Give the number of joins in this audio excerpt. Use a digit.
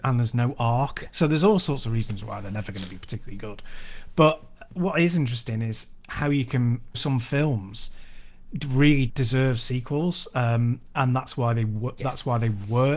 2